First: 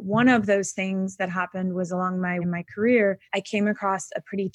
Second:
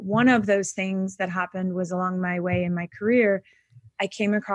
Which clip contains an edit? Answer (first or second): first